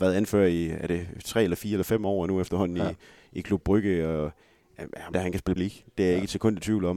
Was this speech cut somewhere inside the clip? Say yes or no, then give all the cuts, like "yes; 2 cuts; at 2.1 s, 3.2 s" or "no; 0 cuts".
yes; 2 cuts; at 5.1 s, 5.6 s